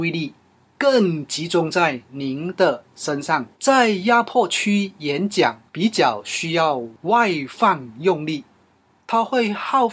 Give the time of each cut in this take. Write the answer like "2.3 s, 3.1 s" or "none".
3.5 s, 5.7 s